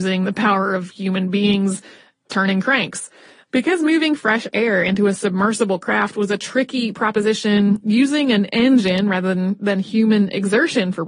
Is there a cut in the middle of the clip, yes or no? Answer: no